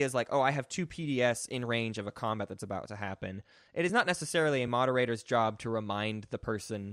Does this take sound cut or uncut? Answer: uncut